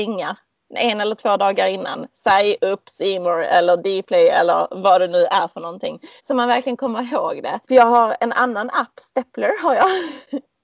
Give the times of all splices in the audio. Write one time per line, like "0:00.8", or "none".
0:06.2
0:07.6

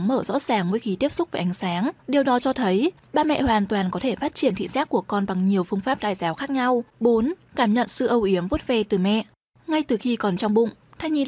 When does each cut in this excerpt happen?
0:02.0
0:06.9
0:09.5

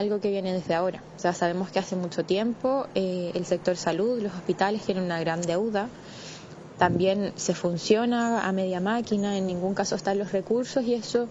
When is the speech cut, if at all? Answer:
none

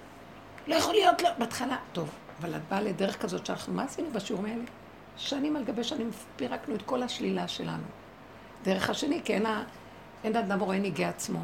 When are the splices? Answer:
none

